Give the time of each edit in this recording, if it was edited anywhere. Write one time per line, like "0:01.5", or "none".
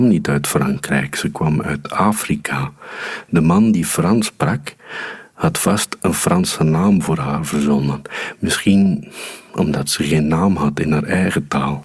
none